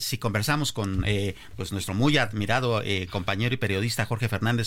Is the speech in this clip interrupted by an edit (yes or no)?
no